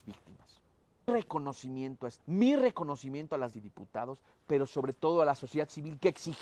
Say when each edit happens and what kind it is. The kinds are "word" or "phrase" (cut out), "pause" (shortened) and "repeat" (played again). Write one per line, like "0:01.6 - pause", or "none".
0:01.1 - word
0:02.2 - word
0:03.5 - word